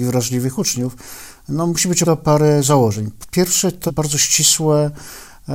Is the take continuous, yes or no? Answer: no